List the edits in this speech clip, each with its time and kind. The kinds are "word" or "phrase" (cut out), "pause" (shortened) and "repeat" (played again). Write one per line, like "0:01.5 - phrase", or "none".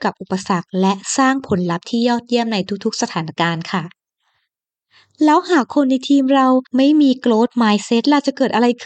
0:06.7 - pause

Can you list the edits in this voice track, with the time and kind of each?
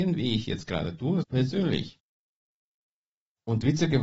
0:01.2 - phrase

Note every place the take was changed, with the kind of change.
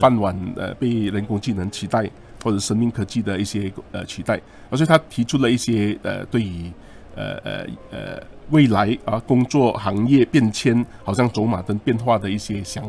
none

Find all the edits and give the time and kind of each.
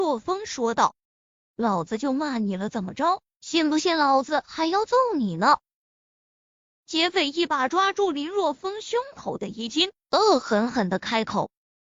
0:01.2 - pause

